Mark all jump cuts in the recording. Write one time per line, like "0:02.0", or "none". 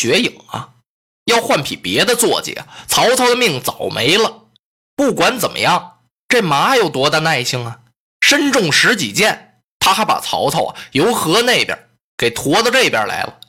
none